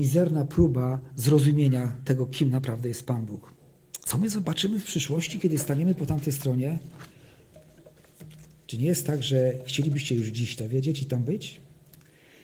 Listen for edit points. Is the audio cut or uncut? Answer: cut